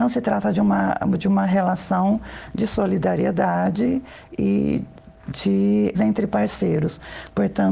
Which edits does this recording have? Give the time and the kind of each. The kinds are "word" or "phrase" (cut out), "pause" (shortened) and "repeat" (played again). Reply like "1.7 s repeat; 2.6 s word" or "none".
5.9 s word